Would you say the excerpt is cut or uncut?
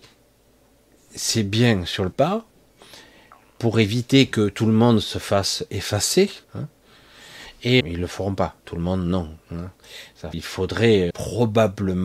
cut